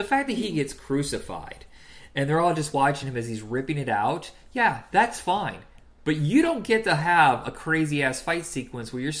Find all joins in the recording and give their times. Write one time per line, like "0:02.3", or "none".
none

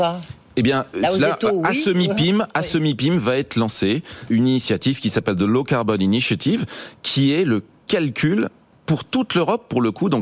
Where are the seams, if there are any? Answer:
0:00.9
0:04.3

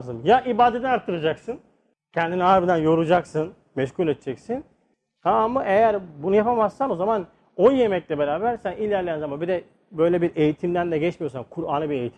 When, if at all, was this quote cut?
none

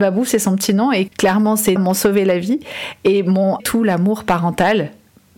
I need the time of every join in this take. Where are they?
0:01.1
0:01.8
0:03.6

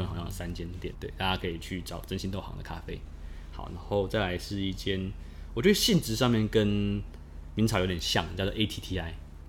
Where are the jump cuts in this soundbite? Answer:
0:00.9

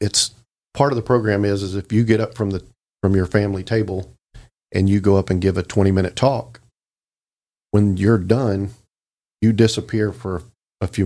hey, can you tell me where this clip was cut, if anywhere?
none

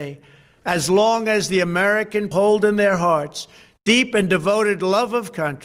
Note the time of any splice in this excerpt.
0:02.3

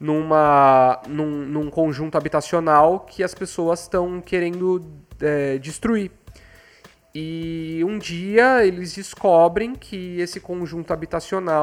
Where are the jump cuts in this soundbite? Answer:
none

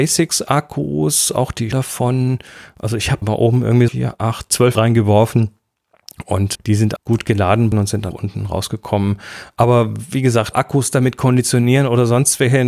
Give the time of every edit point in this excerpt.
0:01.7
0:03.2
0:03.9
0:04.7
0:06.5
0:07.0
0:07.7
0:08.1
0:10.5

